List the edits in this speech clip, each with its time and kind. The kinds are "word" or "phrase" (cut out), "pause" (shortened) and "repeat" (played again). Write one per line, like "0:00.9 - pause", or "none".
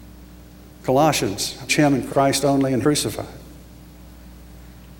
0:01.7 - word
0:02.1 - word
0:02.8 - word